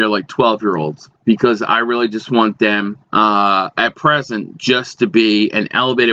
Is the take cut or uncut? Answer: cut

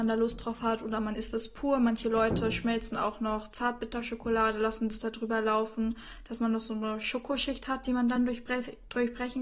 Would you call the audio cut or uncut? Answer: uncut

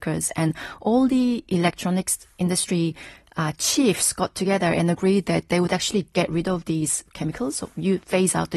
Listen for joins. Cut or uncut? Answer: uncut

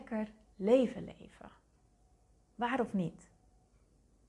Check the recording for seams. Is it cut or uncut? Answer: uncut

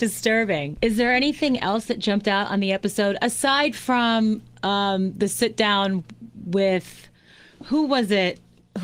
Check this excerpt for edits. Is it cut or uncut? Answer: uncut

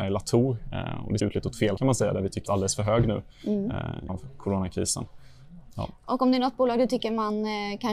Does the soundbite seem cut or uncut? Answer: cut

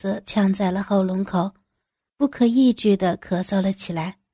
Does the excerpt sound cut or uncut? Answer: uncut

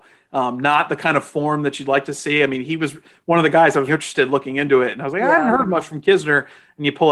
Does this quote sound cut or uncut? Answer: cut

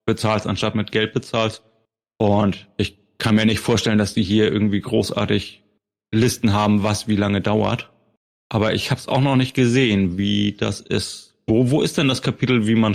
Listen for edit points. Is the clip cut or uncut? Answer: uncut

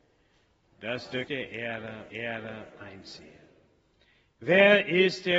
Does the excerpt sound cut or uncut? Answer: cut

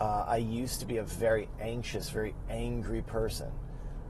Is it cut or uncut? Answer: uncut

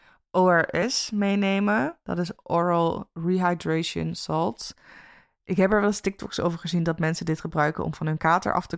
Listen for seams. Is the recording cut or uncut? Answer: uncut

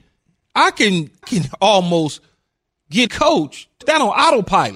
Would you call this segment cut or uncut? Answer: cut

